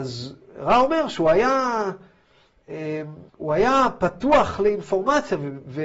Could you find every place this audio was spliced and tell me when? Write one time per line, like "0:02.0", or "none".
0:03.3